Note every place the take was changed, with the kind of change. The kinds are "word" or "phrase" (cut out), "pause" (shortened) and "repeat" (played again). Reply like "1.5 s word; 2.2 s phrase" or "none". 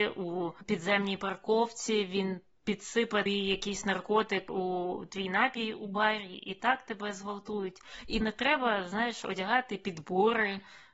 3.3 s word; 8.2 s phrase